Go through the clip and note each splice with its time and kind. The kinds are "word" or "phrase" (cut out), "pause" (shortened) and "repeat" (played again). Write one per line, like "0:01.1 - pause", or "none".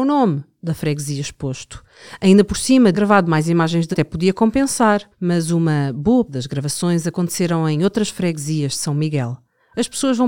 0:02.9 - phrase
0:03.9 - word
0:05.1 - pause
0:06.3 - word